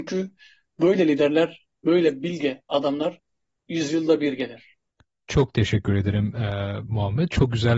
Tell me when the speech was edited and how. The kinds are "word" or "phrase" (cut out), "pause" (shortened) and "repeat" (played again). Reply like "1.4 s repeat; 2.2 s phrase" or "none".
none